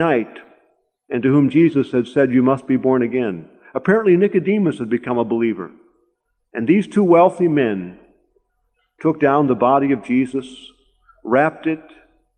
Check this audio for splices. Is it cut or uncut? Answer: uncut